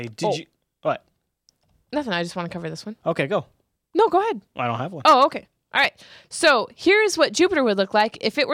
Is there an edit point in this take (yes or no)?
no